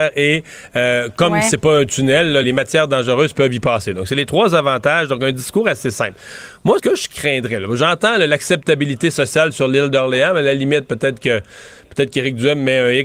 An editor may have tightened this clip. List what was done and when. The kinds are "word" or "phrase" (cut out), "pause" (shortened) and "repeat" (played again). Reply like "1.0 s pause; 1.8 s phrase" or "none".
2.4 s word; 6.8 s word